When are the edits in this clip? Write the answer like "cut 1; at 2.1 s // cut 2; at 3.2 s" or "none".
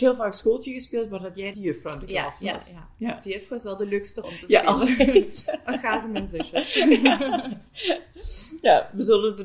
cut 1; at 1.5 s // cut 2; at 4.2 s